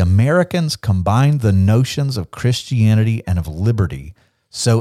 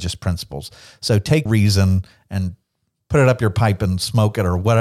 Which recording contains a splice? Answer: second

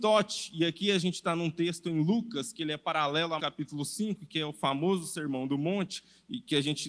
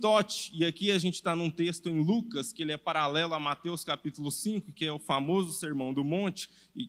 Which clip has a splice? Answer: first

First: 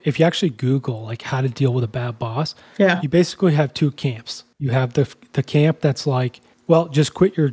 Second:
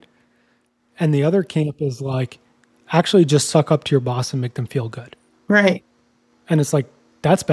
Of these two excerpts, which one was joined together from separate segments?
first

